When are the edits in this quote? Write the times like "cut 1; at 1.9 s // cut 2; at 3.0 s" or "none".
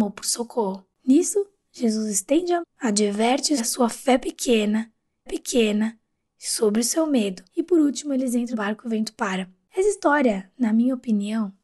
cut 1; at 2.6 s // cut 2; at 3.6 s // cut 3; at 5.3 s // cut 4; at 7.5 s // cut 5; at 8.5 s

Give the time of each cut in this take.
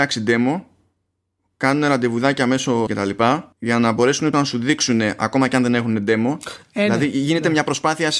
cut 1; at 2.9 s // cut 2; at 3.5 s // cut 3; at 4.3 s

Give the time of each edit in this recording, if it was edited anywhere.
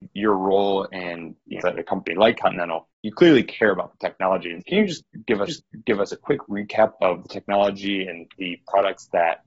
cut 1; at 1.6 s // cut 2; at 2.9 s // cut 3; at 4.6 s // cut 4; at 5.5 s

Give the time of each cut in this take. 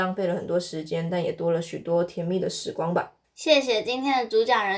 cut 1; at 3.2 s

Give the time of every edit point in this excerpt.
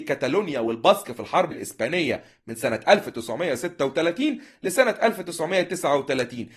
cut 1; at 1.5 s

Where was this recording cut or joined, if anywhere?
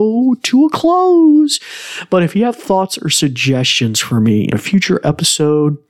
cut 1; at 4.5 s

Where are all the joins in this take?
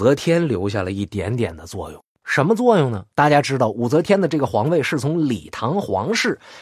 cut 1; at 2.1 s // cut 2; at 3.1 s

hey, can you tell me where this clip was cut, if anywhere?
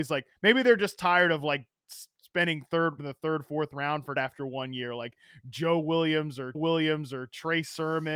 cut 1; at 3.0 s // cut 2; at 4.2 s // cut 3; at 6.5 s

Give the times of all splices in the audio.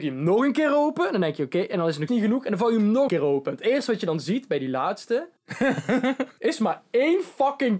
cut 1; at 2.1 s // cut 2; at 3.1 s // cut 3; at 5.4 s

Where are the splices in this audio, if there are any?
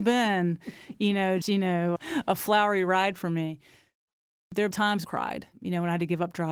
cut 1; at 1.4 s // cut 2; at 2.0 s // cut 3; at 4.7 s // cut 4; at 5.0 s

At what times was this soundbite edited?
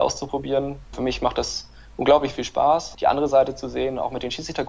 cut 1; at 2.9 s

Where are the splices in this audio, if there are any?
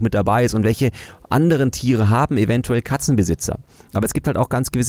none

